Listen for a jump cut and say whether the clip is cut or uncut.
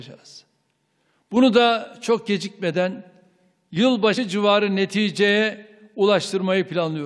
uncut